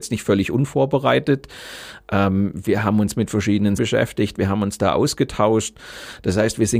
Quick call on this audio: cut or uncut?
cut